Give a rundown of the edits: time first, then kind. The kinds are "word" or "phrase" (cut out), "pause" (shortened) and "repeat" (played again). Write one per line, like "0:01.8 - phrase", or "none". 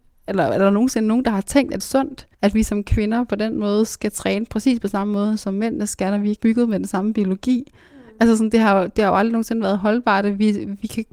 0:01.8 - phrase
0:02.3 - pause
0:06.4 - word

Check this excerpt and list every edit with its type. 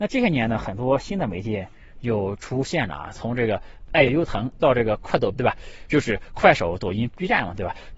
0:05.3 - word

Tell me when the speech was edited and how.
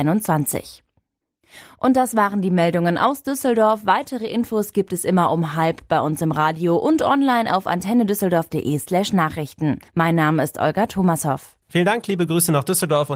0:09.9 - pause
0:11.6 - pause

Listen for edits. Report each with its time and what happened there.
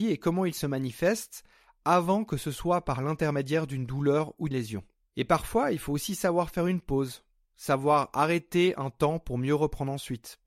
0:04.5 - word

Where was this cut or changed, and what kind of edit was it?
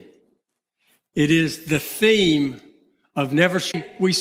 none

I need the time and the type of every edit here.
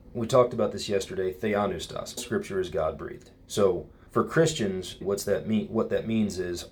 0:02.2 - word
0:04.1 - pause
0:05.0 - word

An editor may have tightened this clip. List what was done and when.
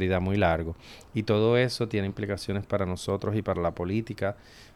none

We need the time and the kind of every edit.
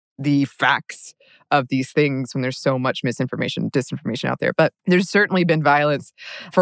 0:04.8 - pause

